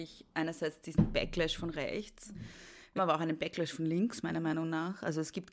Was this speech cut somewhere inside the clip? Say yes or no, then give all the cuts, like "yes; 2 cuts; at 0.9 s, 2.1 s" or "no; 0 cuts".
yes; 1 cut; at 3.0 s